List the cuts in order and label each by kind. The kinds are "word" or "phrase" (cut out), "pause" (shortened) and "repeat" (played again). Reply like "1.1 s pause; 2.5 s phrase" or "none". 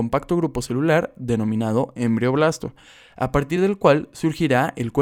none